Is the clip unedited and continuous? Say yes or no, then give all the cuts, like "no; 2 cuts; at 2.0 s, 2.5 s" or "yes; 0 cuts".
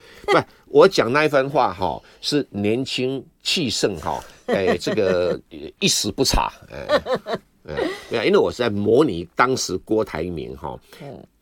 yes; 0 cuts